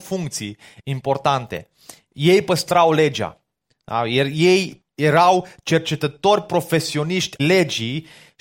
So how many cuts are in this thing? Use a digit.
2